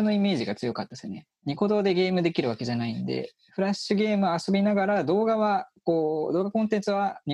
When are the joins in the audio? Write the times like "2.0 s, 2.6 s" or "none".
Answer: none

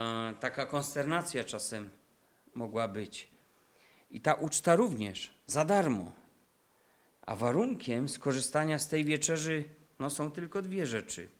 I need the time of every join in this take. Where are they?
none

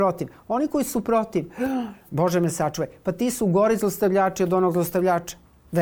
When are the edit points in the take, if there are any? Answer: none

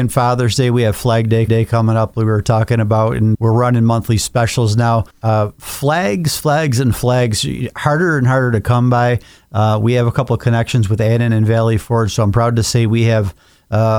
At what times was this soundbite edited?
1.5 s, 3.3 s, 5.1 s

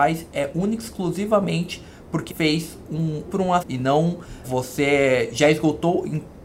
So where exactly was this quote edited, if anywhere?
2.3 s, 3.3 s, 3.6 s, 4.4 s

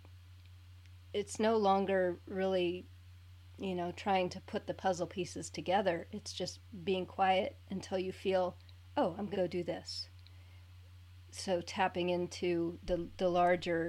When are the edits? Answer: 9.3 s

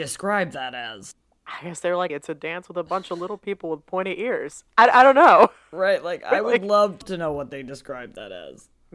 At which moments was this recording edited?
2.1 s

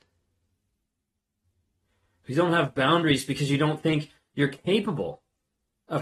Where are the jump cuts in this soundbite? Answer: none

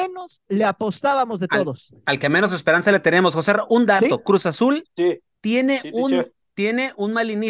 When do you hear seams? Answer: none

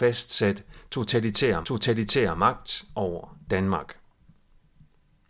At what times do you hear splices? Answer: 1.6 s

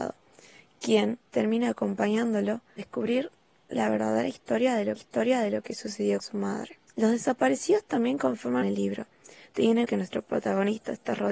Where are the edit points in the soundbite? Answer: 1.3 s, 2.8 s, 5.0 s, 6.2 s, 6.9 s, 8.6 s, 9.8 s

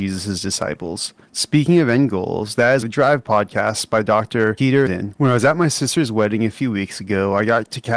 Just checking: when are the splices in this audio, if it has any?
1.2 s, 2.8 s, 4.9 s

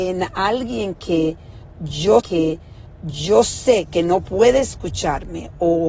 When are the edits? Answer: 2.2 s

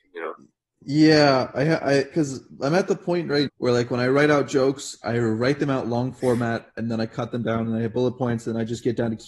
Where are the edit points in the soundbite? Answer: 3.5 s

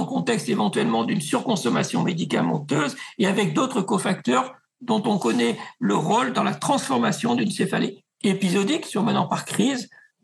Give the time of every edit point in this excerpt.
none

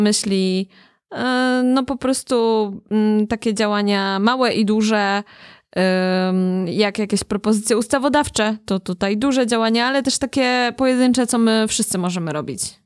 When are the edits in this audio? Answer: none

